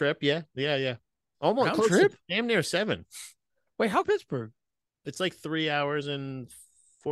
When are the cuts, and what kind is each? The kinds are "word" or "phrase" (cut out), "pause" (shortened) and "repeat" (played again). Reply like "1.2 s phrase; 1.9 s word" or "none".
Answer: 4.0 s phrase